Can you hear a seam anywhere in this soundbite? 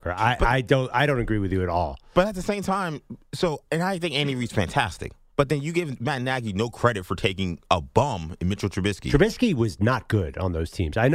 yes; 1 cut; at 5.3 s

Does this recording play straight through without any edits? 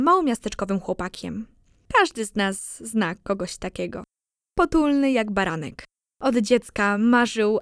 yes; 0 cuts

